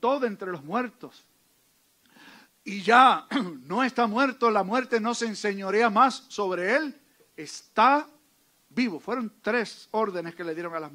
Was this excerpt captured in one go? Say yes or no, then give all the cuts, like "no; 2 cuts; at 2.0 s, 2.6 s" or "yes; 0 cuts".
yes; 0 cuts